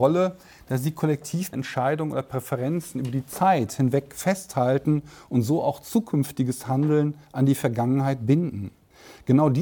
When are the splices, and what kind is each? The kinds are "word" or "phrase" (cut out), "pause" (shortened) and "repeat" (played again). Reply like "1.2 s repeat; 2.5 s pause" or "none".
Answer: 1.5 s word